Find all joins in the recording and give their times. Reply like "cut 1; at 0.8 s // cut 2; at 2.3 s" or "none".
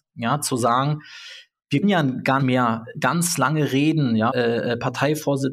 cut 1; at 1.8 s // cut 2; at 2.4 s // cut 3; at 2.9 s // cut 4; at 4.3 s